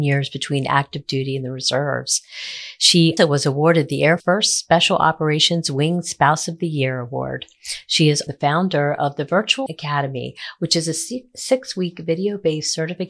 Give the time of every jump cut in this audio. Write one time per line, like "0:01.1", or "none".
0:03.2
0:04.2
0:08.3
0:09.7

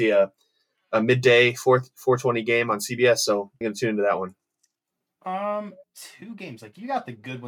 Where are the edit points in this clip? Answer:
0:03.6
0:05.8

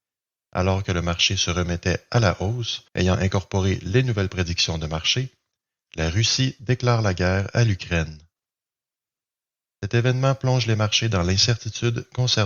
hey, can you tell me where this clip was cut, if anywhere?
0:02.9

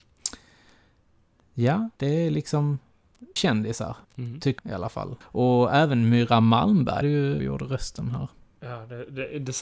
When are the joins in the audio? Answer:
0:02.0
0:03.4
0:04.0
0:04.6
0:05.2
0:07.0
0:07.4

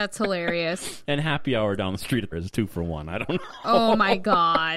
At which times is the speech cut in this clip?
0:02.3

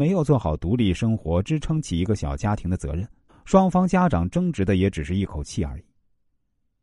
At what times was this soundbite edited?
0:03.3

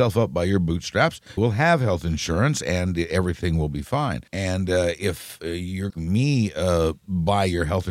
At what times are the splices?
0:01.4
0:04.3
0:05.9

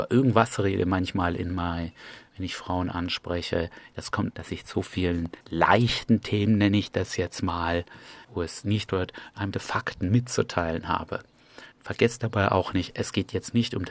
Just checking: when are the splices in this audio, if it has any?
0:04.3
0:04.7
0:05.4
0:08.2
0:08.9
0:09.5
0:11.7

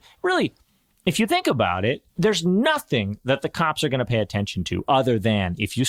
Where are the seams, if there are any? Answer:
0:02.1

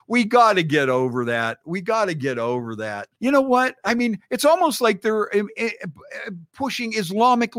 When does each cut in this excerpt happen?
0:03.1

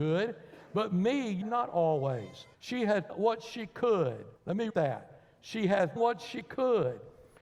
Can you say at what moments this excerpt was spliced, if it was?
0:01.4
0:02.5
0:03.1
0:04.4
0:04.7
0:06.0

